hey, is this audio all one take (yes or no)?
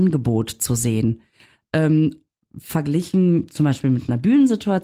yes